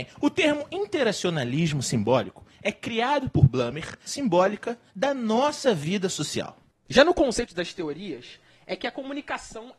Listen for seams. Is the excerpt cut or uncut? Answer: cut